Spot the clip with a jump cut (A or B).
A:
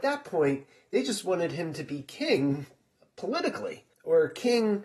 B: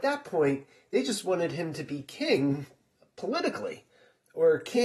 A